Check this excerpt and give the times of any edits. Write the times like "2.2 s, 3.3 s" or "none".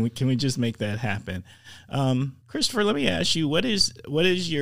2.4 s